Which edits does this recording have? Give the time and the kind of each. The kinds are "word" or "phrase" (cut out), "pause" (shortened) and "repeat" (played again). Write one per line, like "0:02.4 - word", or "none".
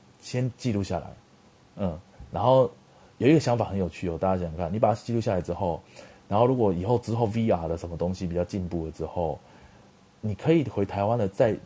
none